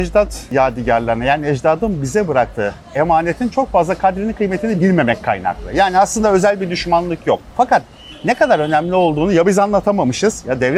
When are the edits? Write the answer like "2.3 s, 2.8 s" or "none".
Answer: none